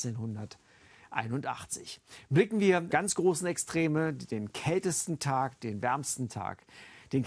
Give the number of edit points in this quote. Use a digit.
1